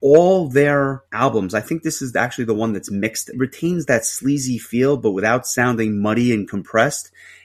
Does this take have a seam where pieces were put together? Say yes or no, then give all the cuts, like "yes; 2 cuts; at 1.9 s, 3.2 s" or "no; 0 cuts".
yes; 2 cuts; at 1.1 s, 3.3 s